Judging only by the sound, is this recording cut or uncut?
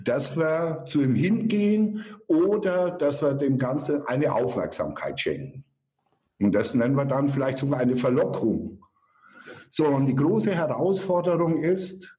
cut